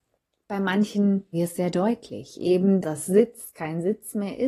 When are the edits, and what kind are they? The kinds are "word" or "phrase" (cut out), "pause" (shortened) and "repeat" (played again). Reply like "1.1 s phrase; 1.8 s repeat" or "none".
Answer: 1.3 s word; 2.8 s word